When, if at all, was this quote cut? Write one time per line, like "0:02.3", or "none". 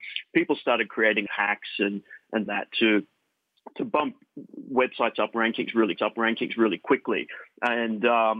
0:01.3
0:02.5
0:06.0